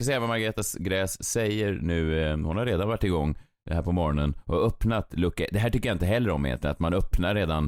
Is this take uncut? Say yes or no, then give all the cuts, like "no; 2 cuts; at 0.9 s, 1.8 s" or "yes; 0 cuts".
yes; 0 cuts